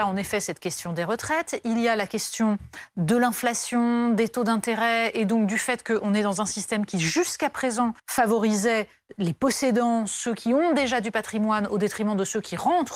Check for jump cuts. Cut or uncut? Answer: cut